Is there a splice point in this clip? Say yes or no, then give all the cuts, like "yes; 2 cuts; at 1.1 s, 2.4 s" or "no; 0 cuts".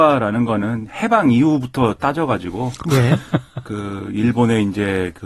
no; 0 cuts